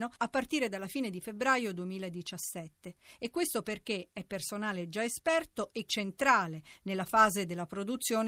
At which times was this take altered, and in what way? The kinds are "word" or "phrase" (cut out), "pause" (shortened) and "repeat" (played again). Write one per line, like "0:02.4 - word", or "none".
0:05.9 - word